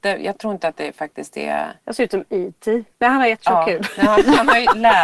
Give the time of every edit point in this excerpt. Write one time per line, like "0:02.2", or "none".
0:02.9